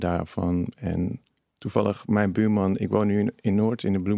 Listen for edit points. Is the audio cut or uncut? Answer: uncut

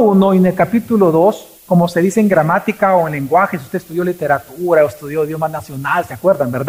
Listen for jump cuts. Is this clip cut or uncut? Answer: cut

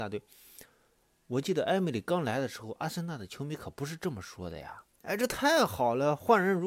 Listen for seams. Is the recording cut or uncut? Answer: cut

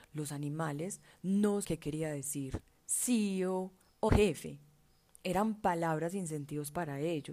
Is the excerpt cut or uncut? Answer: cut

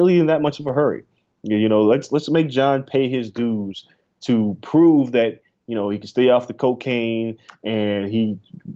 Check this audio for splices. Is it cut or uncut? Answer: uncut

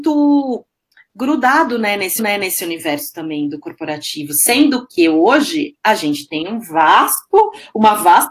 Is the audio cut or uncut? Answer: cut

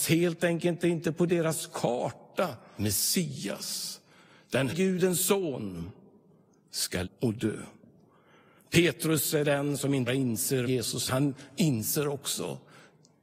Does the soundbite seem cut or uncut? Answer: cut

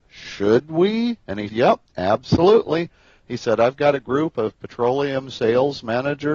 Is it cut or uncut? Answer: cut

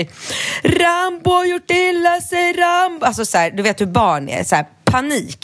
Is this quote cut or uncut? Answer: uncut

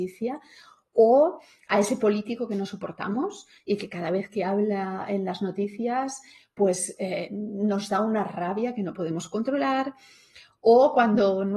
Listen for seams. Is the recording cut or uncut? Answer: uncut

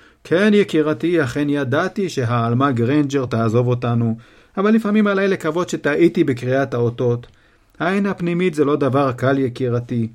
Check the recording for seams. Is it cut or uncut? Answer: uncut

